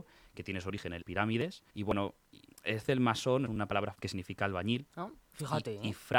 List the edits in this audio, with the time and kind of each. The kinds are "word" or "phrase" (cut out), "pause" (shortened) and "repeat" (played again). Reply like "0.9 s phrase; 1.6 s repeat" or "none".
1.0 s word; 1.7 s pause; 2.9 s word; 3.5 s phrase; 3.9 s word